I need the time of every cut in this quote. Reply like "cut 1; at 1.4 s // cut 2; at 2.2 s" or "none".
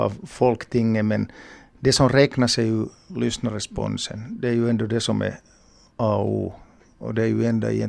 none

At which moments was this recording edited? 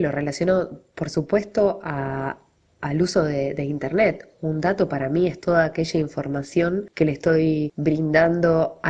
none

